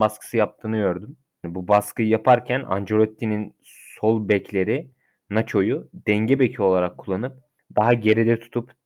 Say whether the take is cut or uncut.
uncut